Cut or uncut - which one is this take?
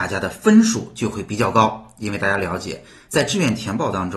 uncut